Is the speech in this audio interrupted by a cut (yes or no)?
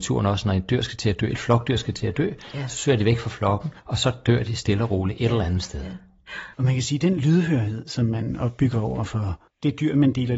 yes